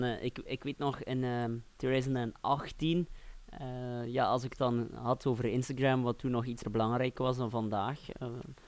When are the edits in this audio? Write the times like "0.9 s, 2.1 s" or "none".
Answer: 1.7 s, 6.6 s